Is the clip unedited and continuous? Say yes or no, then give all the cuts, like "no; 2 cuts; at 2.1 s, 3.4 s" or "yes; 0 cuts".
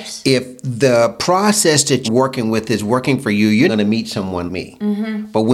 no; 3 cuts; at 2.0 s, 3.7 s, 4.5 s